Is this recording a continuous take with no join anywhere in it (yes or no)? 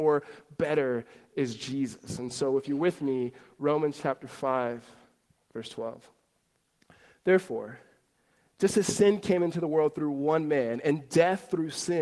yes